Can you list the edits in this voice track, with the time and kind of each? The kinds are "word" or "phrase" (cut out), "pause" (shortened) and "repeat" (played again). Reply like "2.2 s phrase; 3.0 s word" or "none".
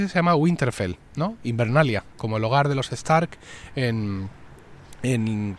none